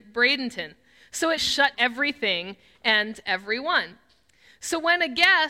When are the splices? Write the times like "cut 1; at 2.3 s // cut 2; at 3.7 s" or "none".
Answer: cut 1; at 1.4 s // cut 2; at 1.7 s